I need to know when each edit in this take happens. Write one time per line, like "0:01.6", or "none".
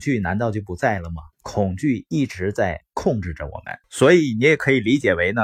0:01.3
0:03.8